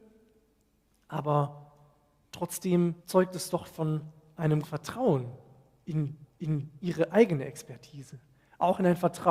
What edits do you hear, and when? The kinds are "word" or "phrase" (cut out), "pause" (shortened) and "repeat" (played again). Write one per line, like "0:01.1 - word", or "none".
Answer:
0:03.0 - pause
0:04.6 - word
0:06.2 - repeat